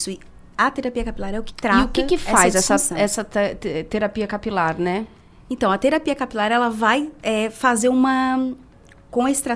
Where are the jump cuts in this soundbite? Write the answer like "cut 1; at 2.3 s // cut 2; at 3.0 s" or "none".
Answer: cut 1; at 1.5 s